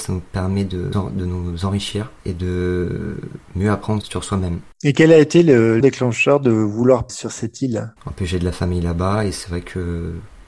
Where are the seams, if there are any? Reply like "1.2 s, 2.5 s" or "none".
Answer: 0.9 s, 2.2 s, 3.4 s, 4.0 s, 4.7 s, 5.8 s, 7.1 s, 8.0 s